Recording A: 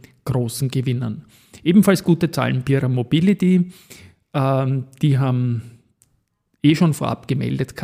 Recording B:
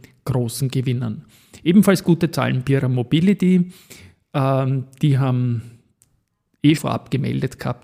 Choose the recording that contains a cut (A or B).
B